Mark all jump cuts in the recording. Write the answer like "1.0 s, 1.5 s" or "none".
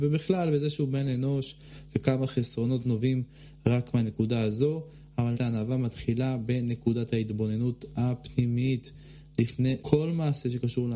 5.3 s, 9.8 s

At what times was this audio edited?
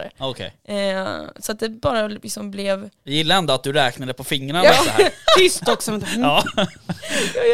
none

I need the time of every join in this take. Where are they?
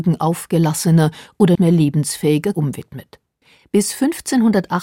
1.5 s, 2.5 s, 3.4 s

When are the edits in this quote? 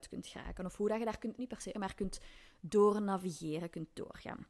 1.4 s, 1.7 s

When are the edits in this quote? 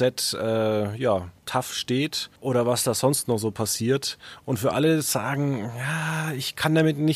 2.4 s

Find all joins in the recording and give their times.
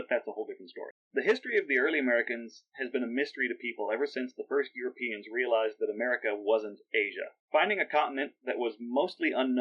1.0 s, 7.4 s

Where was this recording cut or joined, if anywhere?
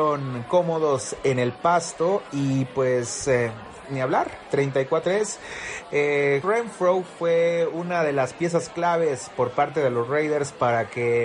5.0 s, 6.4 s

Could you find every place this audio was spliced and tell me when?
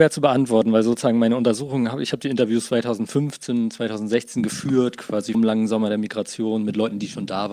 2.7 s, 5.3 s

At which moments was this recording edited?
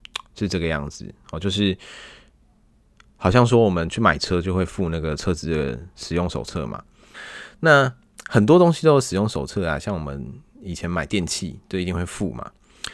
none

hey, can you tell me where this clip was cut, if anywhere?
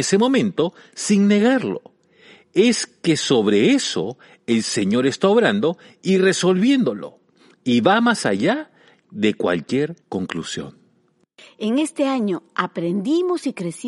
10.0 s

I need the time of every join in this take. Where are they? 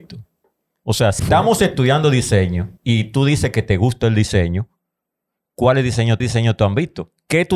1.2 s, 2.8 s, 6.2 s

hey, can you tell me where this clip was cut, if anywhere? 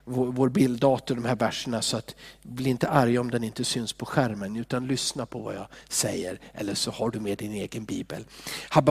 none

